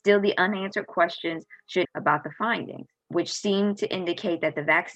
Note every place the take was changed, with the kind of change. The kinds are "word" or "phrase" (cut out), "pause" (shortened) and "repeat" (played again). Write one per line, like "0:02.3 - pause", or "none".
0:01.8 - phrase
0:03.0 - pause